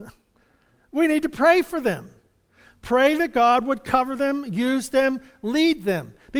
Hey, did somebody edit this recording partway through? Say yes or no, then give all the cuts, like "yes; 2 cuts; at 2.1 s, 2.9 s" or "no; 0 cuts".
no; 0 cuts